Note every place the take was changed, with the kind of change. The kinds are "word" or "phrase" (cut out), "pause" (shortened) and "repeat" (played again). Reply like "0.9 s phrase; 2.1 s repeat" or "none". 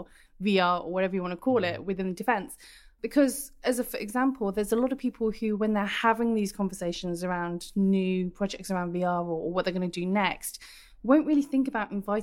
none